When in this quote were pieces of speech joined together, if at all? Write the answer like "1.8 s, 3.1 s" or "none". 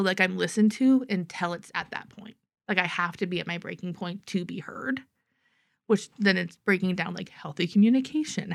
none